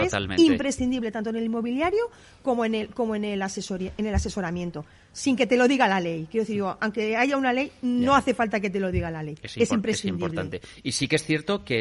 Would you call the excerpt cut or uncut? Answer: uncut